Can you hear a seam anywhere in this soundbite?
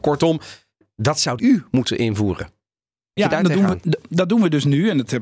yes; 2 cuts; at 1.4 s, 3.2 s

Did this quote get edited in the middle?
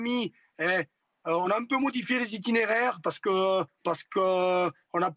no; 0 cuts

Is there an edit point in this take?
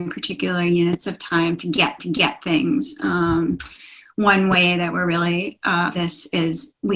yes; 2 cuts; at 2.0 s, 5.9 s

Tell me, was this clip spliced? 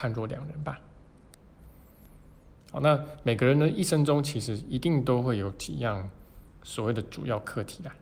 yes; 1 cut; at 2.6 s

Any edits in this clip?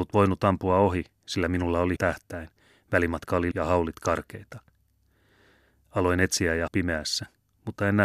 yes; 3 cuts; at 2.0 s, 3.5 s, 6.7 s

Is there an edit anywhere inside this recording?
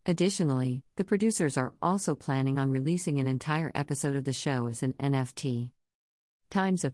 no; 0 cuts

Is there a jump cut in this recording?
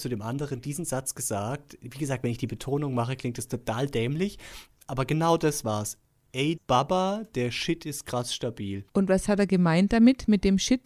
yes; 2 cuts; at 6.6 s, 8.9 s

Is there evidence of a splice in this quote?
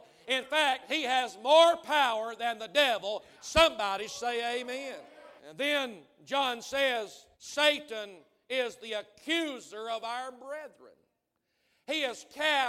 yes; 2 cuts; at 5.4 s, 7.3 s

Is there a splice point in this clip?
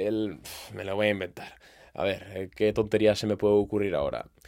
no; 0 cuts

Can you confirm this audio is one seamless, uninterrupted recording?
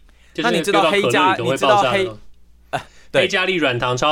yes; 0 cuts

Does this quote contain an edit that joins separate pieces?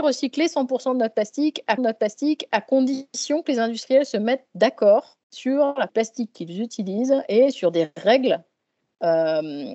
yes; 3 cuts; at 1.8 s, 5.2 s, 5.9 s

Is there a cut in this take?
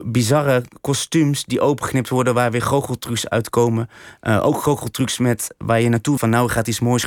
yes; 1 cut; at 6.2 s

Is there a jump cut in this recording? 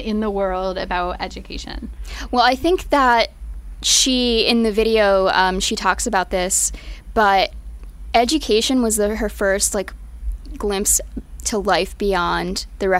no; 0 cuts

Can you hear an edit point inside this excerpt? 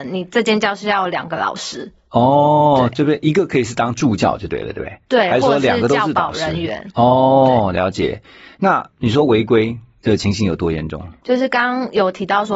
no; 0 cuts

